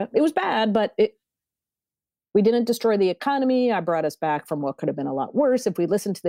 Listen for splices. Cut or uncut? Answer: uncut